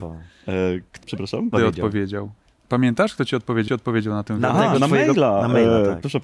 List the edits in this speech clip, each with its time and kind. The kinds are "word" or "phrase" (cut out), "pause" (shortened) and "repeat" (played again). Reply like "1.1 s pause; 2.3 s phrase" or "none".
1.0 s word; 1.5 s phrase; 2.4 s pause; 3.7 s repeat